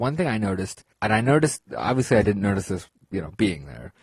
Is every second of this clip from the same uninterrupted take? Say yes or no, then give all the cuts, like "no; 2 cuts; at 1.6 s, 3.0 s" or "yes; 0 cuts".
no; 1 cut; at 0.9 s